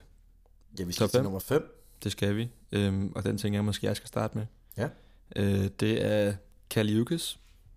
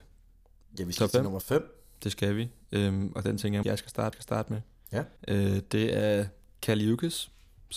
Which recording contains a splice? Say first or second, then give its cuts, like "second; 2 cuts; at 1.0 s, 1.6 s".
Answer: second; 3 cuts; at 3.6 s, 4.1 s, 5.2 s